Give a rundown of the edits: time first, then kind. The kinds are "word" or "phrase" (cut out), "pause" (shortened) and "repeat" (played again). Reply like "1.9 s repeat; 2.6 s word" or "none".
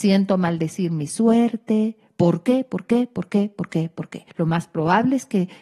4.3 s pause